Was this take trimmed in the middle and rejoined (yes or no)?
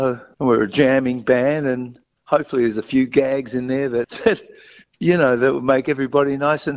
no